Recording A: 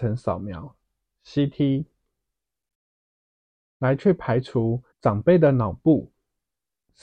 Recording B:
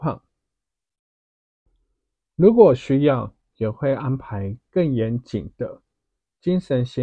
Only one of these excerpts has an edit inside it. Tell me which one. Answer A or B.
A